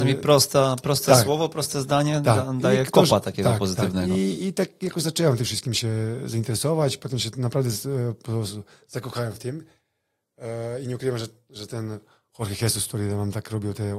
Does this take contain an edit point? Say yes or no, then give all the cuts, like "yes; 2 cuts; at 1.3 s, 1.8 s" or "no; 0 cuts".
no; 0 cuts